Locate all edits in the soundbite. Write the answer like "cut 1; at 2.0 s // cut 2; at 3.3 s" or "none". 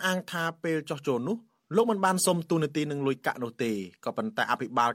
none